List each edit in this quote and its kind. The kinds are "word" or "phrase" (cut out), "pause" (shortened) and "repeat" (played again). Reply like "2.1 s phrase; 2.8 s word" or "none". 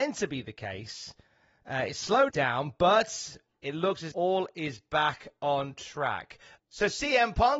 2.3 s word; 4.1 s word